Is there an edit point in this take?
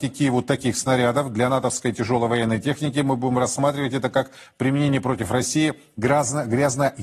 no; 0 cuts

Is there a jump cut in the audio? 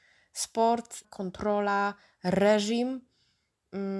yes; 1 cut; at 1.0 s

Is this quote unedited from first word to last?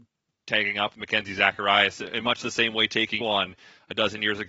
no; 2 cuts; at 0.9 s, 3.2 s

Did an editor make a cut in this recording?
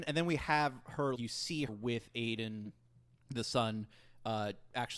yes; 2 cuts; at 1.2 s, 1.7 s

